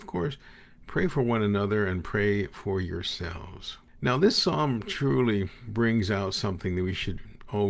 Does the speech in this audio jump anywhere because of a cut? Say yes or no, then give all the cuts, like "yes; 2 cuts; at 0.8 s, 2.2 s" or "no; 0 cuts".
no; 0 cuts